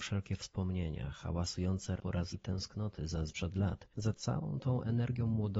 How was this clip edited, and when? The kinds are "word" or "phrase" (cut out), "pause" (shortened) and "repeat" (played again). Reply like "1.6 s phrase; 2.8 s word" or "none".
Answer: 2.0 s word; 2.3 s word; 3.3 s word; 3.9 s pause